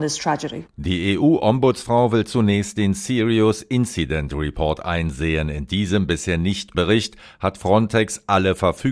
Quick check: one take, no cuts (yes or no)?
no